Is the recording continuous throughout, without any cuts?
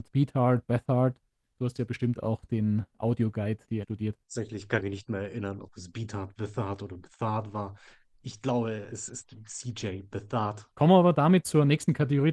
no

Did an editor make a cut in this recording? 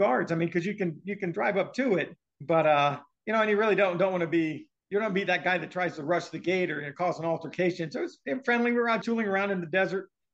yes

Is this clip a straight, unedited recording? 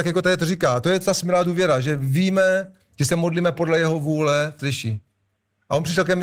no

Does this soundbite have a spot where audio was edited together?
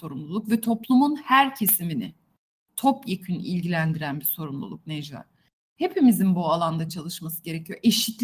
no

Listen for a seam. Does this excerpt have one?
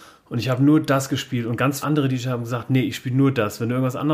yes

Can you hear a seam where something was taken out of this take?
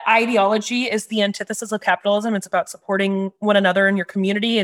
no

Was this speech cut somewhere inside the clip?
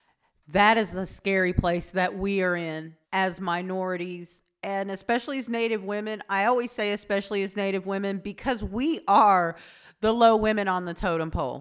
yes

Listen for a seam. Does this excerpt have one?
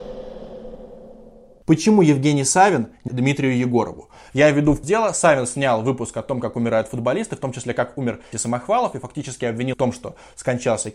yes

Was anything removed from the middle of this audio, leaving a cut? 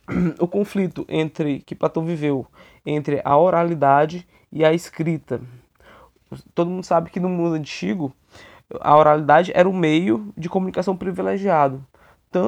no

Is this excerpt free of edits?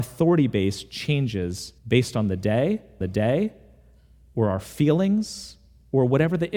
no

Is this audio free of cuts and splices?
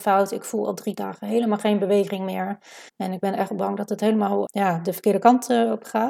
no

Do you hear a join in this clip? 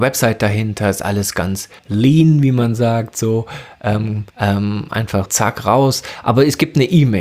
yes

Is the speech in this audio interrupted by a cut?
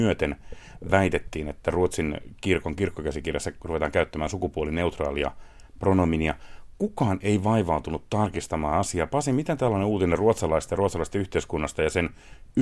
no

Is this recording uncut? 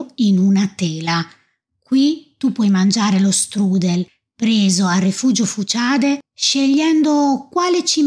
yes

